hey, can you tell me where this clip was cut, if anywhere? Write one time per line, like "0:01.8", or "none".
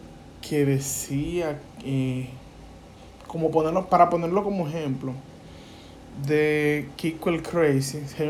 none